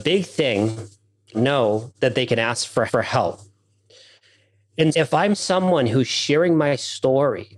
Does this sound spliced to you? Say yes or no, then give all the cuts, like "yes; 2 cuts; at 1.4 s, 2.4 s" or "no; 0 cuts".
yes; 3 cuts; at 1.3 s, 2.9 s, 4.9 s